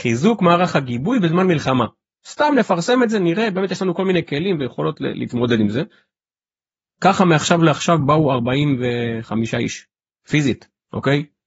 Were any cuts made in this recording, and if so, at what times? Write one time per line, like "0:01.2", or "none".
none